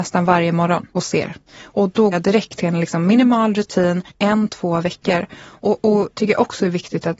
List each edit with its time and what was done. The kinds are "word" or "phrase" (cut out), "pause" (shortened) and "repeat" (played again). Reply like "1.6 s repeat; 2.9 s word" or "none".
0.9 s pause; 2.1 s word; 2.6 s word; 4.1 s pause; 6.1 s word